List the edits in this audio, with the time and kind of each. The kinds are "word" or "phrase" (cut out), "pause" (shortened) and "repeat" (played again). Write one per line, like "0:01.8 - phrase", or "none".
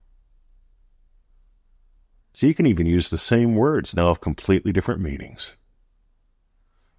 none